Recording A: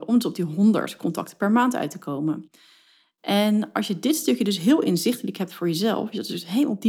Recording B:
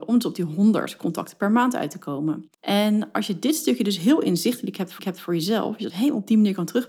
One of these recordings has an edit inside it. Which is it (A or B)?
B